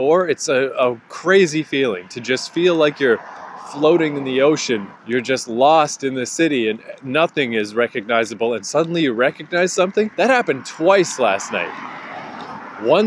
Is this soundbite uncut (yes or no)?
no